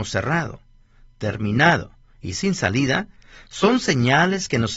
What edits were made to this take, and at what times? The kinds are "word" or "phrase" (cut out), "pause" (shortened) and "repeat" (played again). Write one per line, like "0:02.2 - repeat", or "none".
none